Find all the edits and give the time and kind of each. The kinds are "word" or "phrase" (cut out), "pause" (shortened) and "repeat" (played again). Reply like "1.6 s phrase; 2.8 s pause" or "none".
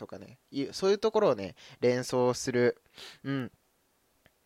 none